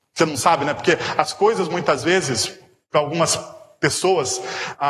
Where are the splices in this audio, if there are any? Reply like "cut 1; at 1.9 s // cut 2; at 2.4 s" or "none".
none